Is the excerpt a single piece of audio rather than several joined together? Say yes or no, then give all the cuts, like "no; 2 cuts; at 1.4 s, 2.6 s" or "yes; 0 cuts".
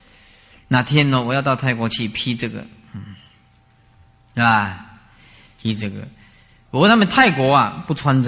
yes; 0 cuts